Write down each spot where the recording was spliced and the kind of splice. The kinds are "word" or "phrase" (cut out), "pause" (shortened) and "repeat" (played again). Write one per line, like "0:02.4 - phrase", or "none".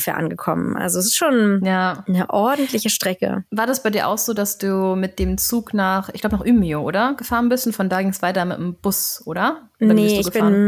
0:03.5 - pause